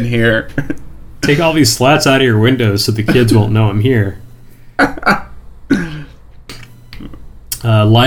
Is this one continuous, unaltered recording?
yes; 0 cuts

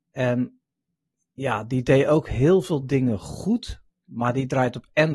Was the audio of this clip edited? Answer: no; 0 cuts

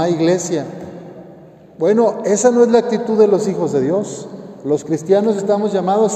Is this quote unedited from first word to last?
yes; 0 cuts

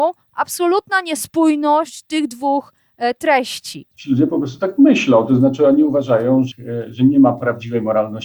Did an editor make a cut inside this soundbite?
no; 0 cuts

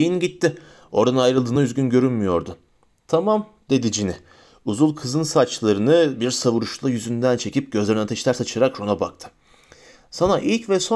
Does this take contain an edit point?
no; 0 cuts

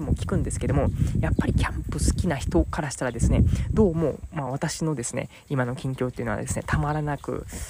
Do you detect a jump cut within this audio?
no; 0 cuts

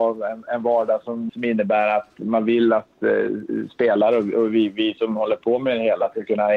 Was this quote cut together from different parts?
yes; 1 cut; at 1.3 s

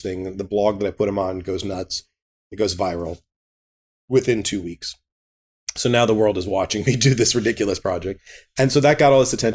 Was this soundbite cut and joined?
no; 0 cuts

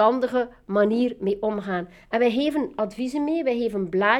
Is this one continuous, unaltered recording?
yes; 0 cuts

